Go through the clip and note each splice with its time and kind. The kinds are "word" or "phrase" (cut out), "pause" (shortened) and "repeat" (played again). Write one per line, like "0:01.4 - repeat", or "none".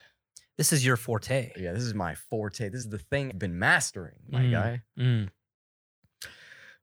0:02.8 - phrase
0:03.3 - word